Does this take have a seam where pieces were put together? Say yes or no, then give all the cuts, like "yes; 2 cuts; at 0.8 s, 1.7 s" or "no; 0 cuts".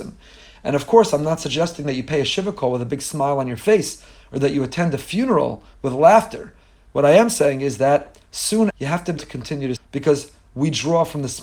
yes; 3 cuts; at 8.7 s, 9.2 s, 9.8 s